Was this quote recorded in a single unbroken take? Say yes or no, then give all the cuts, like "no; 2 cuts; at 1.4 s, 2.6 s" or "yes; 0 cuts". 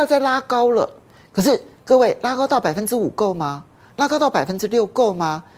yes; 0 cuts